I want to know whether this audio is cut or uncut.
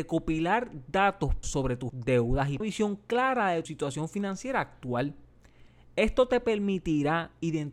cut